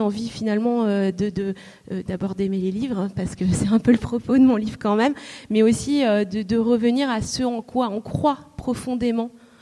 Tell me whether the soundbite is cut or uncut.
uncut